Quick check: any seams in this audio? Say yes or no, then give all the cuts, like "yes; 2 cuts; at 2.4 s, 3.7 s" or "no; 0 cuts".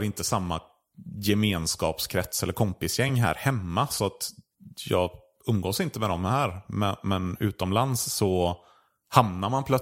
no; 0 cuts